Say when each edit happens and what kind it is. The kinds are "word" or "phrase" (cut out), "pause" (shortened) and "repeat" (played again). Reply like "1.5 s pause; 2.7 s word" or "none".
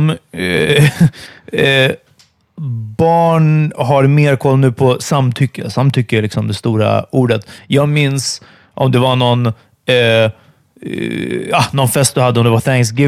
none